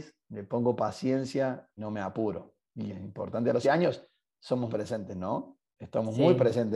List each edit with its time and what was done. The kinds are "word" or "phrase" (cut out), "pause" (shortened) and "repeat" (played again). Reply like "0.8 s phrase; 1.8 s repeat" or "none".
1.8 s word; 2.9 s word; 3.6 s word; 4.7 s word